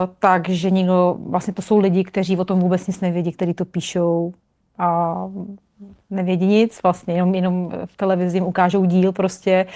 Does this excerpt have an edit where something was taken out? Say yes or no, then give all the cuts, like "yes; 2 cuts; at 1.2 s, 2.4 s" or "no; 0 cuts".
no; 0 cuts